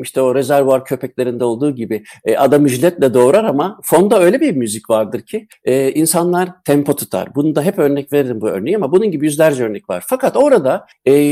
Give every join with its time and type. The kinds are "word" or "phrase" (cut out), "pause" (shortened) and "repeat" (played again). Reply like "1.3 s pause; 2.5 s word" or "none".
none